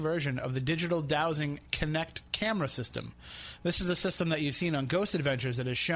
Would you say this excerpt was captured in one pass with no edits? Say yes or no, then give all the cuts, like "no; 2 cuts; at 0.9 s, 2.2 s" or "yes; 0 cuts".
yes; 0 cuts